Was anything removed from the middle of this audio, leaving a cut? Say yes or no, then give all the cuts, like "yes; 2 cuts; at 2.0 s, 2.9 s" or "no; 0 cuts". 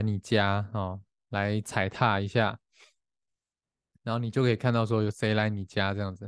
no; 0 cuts